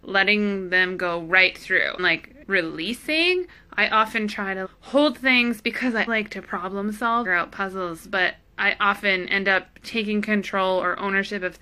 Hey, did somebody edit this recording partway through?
yes; 6 cuts; at 2.0 s, 2.4 s, 4.6 s, 6.1 s, 7.2 s, 9.7 s

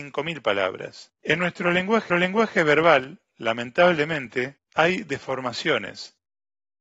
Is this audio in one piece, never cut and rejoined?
no; 3 cuts; at 1.2 s, 2.1 s, 4.6 s

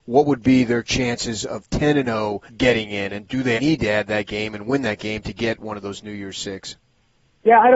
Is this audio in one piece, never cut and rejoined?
no; 2 cuts; at 2.5 s, 3.6 s

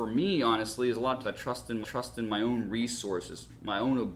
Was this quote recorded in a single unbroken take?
no; 2 cuts; at 1.2 s, 1.8 s

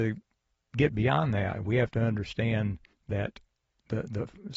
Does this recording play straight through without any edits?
no; 1 cut; at 2.9 s

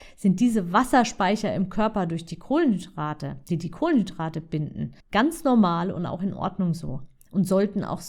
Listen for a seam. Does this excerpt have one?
yes; 1 cut; at 5.0 s

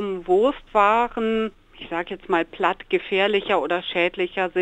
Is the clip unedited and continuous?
yes; 0 cuts

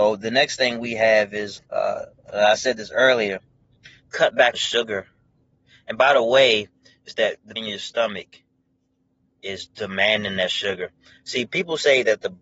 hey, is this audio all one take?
no; 4 cuts; at 1.6 s, 4.0 s, 4.5 s, 7.6 s

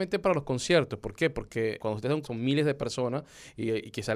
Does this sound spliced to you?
yes; 2 cuts; at 1.8 s, 2.2 s

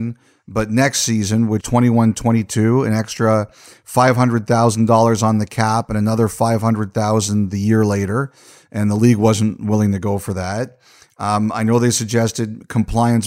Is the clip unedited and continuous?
no; 1 cut; at 1.6 s

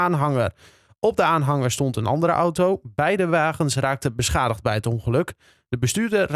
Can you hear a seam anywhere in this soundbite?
no; 0 cuts

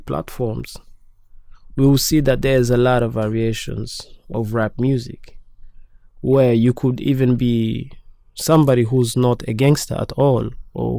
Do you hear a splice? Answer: no; 0 cuts

